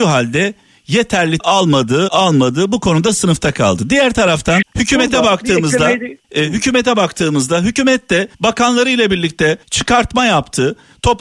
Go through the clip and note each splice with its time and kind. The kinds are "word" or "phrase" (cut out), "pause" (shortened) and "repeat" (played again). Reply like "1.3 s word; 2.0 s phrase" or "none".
1.4 s word; 2.1 s word; 4.6 s word; 6.2 s pause; 8.3 s pause; 9.6 s pause